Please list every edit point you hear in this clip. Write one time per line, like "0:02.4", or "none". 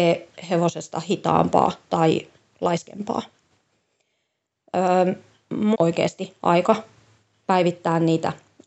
0:05.7